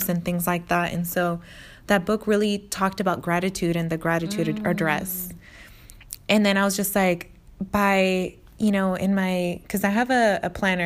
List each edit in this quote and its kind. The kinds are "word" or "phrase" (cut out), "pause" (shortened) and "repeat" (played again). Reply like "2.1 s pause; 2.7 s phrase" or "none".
none